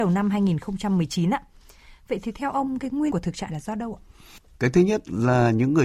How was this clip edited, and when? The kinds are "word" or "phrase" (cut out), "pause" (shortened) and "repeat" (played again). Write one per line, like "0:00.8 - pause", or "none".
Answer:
0:03.1 - word
0:03.5 - word